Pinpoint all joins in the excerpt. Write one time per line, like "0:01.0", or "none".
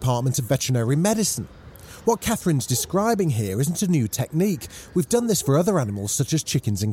none